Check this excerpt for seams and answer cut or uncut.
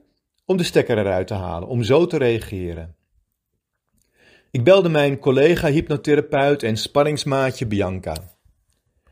uncut